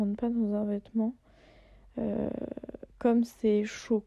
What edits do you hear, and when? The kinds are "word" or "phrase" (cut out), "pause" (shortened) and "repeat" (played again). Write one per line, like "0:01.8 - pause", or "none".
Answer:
0:02.9 - pause

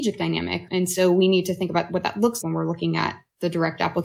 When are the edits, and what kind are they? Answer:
0:02.4 - word

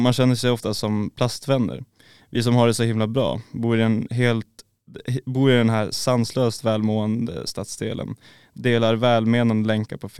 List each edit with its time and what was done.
none

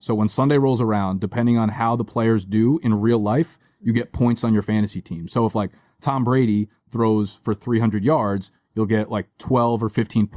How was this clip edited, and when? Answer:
none

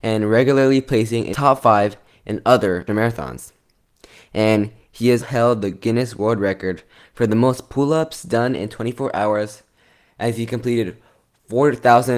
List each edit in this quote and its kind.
0:01.3 - word
0:02.9 - word
0:05.2 - word

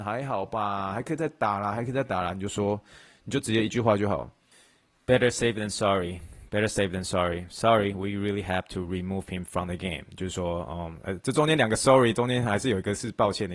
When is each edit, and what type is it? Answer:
none

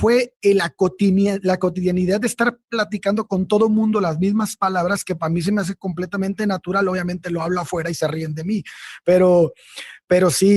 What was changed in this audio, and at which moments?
none

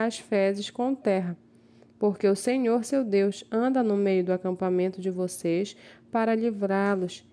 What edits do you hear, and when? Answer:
none

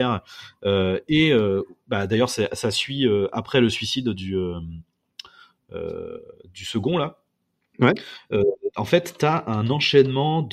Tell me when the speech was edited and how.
none

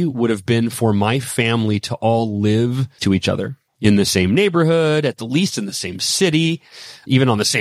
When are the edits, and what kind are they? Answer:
0:03.0 - word
0:03.7 - pause

